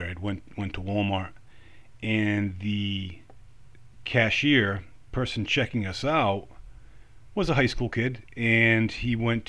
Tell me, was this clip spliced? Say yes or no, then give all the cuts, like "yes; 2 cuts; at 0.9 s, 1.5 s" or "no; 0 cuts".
no; 0 cuts